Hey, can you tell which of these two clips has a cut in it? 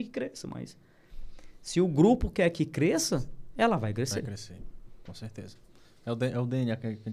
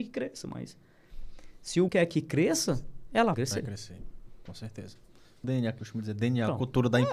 second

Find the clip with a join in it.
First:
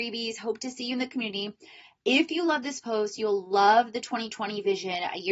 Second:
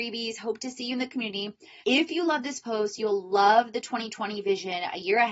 second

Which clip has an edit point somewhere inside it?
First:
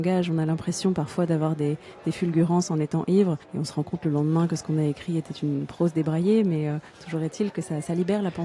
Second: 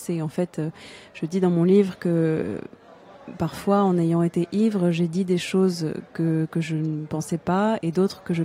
first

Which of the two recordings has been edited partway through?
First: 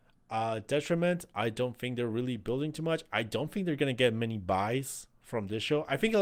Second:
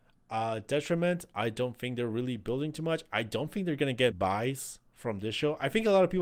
second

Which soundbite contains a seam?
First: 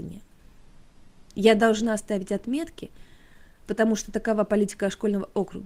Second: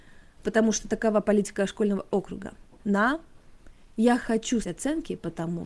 second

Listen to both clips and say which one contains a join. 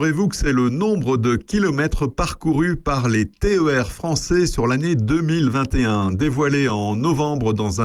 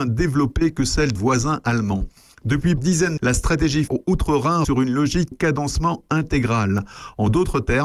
second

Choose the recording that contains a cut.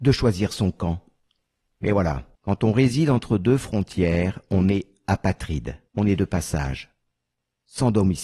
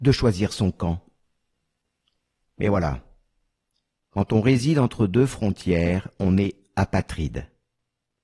first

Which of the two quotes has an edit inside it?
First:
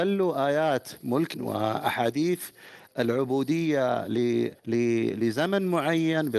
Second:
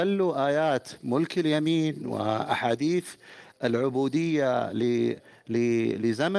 first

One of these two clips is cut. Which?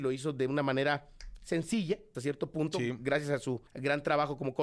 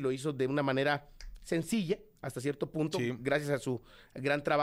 first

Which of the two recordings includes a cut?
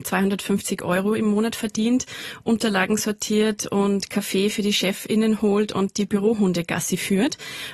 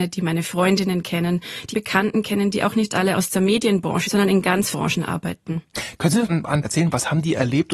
second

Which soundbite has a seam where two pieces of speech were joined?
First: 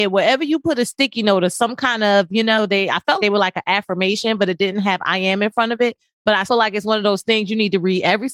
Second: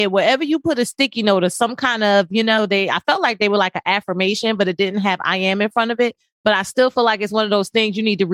first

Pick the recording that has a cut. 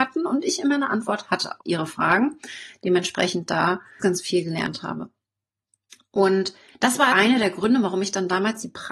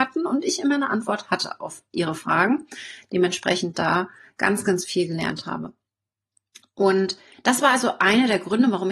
first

